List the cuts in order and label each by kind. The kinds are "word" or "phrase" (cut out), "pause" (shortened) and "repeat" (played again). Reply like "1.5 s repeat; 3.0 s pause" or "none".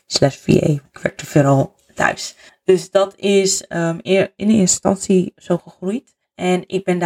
none

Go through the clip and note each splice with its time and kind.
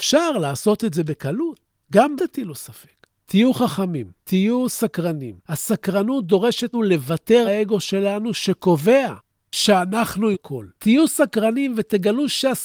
2.2 s word; 4.2 s pause; 5.4 s pause; 6.7 s word; 7.4 s word; 10.3 s word; 10.7 s pause

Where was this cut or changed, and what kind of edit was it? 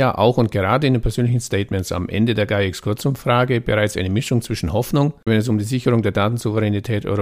5.3 s word

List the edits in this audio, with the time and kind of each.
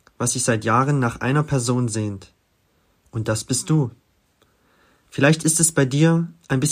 none

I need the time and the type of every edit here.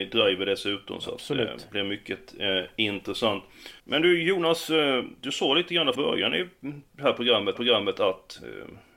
3.8 s pause; 5.9 s word; 7.5 s repeat

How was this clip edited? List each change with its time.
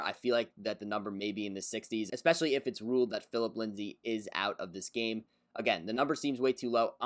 none

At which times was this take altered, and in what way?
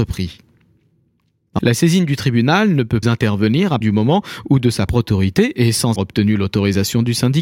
1.6 s word; 3.0 s word; 3.8 s word; 4.9 s word; 6.0 s word

